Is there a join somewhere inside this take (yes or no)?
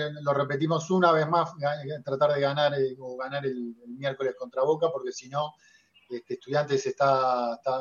no